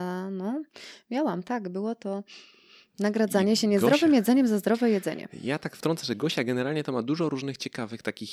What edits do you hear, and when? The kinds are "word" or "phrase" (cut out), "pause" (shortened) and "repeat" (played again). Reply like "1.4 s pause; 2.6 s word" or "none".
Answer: none